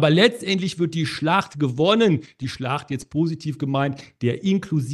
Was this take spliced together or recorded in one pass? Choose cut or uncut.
uncut